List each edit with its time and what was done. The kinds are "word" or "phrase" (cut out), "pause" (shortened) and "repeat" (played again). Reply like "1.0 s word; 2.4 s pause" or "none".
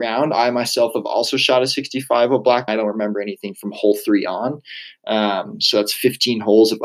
2.7 s phrase